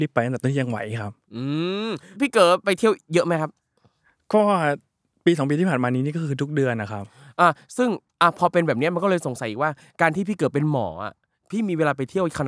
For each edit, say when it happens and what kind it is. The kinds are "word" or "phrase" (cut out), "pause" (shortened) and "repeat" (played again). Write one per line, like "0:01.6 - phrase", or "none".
none